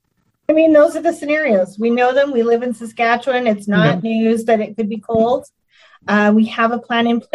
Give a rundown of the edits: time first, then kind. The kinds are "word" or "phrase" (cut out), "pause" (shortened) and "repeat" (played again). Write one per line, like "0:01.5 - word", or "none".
none